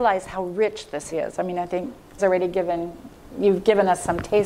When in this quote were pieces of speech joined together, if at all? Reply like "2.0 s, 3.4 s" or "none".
1.1 s, 2.2 s